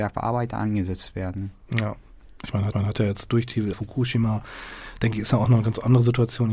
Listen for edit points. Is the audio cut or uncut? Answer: cut